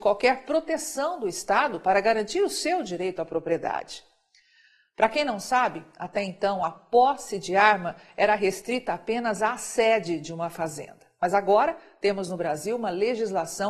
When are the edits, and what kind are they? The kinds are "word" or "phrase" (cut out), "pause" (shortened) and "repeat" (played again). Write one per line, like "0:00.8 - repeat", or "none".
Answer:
none